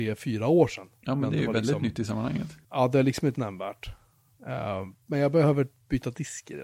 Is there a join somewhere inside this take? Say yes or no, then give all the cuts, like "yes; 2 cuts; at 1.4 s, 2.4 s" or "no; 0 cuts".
yes; 3 cuts; at 2.6 s, 3.4 s, 5.0 s